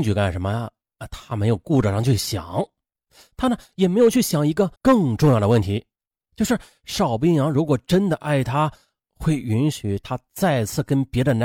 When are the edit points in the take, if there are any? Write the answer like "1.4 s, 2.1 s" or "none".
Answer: 4.8 s